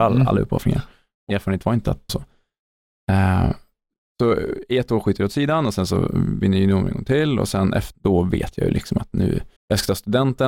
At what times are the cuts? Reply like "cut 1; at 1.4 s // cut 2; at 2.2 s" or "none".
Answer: cut 1; at 1.3 s // cut 2; at 2.1 s // cut 3; at 7.9 s // cut 4; at 9.6 s